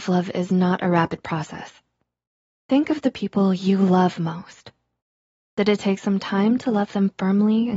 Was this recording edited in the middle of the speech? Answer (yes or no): no